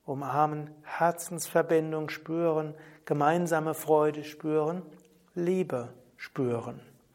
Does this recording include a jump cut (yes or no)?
no